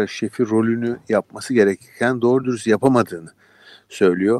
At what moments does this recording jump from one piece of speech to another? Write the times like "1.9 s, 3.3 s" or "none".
none